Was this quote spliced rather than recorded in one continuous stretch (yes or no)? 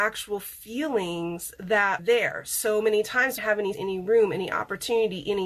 yes